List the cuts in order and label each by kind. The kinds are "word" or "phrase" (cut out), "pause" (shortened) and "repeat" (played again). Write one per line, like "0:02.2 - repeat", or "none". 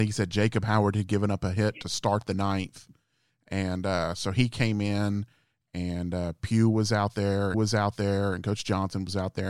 0:07.5 - repeat